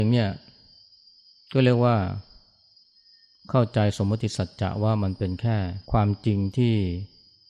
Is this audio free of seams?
no; 1 cut; at 5.8 s

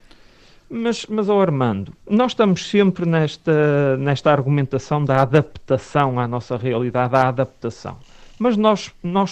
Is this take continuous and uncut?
no; 1 cut; at 2.0 s

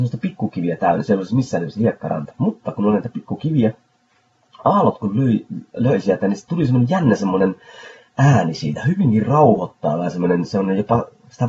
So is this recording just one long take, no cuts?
yes; 0 cuts

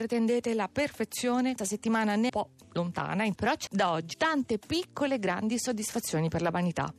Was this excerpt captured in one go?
no; 5 cuts; at 1.6 s, 2.3 s, 3.4 s, 3.7 s, 4.1 s

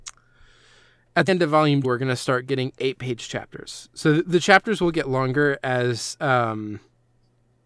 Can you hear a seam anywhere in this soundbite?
yes; 2 cuts; at 1.3 s, 1.8 s

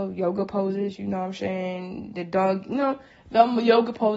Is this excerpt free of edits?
yes; 0 cuts

